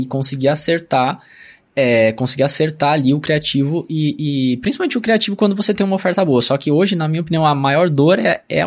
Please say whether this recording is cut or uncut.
uncut